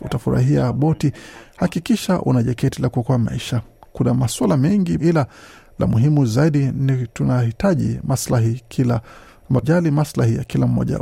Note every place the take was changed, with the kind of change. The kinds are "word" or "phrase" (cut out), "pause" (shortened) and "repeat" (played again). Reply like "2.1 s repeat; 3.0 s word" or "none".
5.0 s word; 9.6 s word